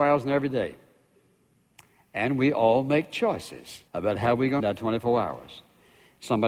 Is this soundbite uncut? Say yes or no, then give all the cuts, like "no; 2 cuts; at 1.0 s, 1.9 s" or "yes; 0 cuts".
no; 2 cuts; at 3.9 s, 4.6 s